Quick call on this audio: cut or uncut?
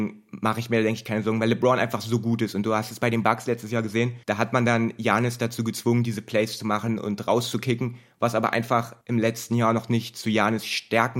cut